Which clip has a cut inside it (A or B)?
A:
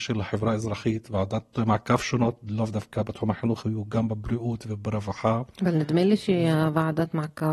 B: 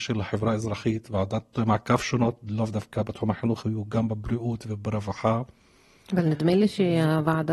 A